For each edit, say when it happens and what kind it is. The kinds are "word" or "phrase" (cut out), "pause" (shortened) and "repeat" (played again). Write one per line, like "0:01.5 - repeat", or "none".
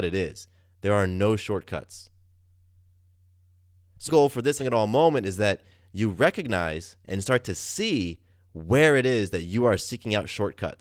0:04.1 - word
0:04.6 - word